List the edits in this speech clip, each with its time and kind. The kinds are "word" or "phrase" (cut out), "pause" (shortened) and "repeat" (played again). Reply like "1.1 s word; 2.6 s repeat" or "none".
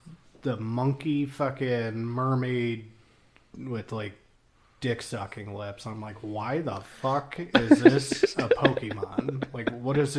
none